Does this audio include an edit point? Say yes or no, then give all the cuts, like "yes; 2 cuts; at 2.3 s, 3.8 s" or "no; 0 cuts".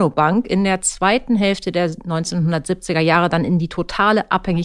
no; 0 cuts